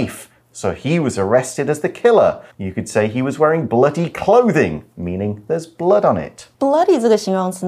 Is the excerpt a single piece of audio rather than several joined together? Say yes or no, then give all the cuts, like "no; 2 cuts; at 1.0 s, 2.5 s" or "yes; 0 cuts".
no; 2 cuts; at 2.5 s, 6.5 s